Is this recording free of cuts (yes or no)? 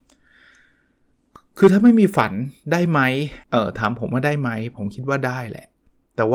no